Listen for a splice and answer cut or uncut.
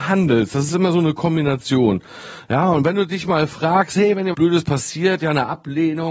cut